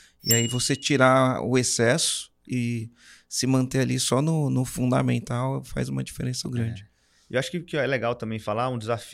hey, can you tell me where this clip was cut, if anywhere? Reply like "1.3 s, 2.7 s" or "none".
6.4 s